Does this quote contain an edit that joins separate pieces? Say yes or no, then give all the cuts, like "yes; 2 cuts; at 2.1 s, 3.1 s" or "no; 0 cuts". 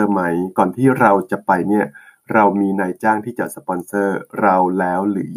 no; 0 cuts